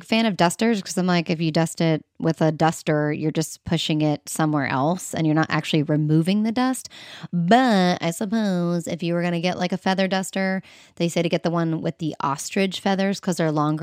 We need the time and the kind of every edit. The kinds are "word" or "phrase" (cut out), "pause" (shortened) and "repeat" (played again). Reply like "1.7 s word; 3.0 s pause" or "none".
none